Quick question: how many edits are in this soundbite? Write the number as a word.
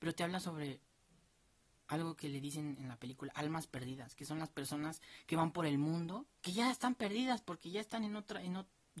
one